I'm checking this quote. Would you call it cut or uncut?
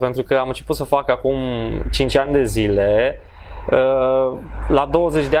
uncut